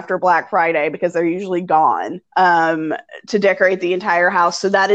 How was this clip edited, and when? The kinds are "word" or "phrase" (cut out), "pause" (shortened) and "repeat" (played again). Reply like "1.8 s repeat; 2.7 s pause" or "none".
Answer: 2.3 s pause